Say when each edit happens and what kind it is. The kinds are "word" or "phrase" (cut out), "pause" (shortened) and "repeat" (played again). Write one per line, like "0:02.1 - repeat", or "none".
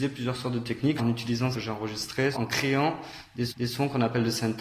0:01.0 - word
0:01.5 - phrase
0:02.3 - word
0:03.5 - repeat